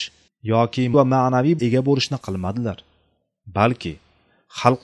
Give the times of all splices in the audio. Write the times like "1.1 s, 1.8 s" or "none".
0.9 s, 1.6 s, 2.2 s